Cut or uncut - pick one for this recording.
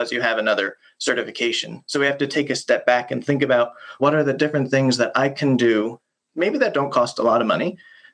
cut